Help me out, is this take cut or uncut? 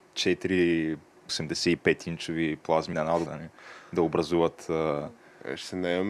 cut